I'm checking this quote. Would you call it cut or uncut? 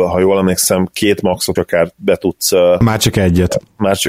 cut